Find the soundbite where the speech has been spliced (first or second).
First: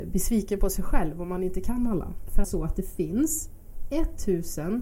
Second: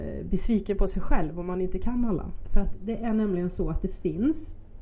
first